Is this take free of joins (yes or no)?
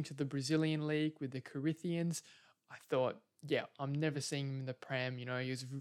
yes